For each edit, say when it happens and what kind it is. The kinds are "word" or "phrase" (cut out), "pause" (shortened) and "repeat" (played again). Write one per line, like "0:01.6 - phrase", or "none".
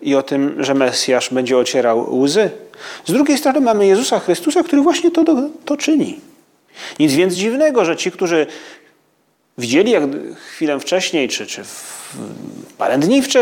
none